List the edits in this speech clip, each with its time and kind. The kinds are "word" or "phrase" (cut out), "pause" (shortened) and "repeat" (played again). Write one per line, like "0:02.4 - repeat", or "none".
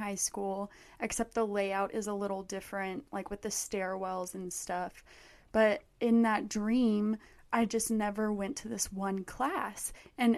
none